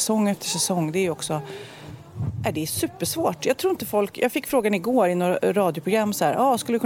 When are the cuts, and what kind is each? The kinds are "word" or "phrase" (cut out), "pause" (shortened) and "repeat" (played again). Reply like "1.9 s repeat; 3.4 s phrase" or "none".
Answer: none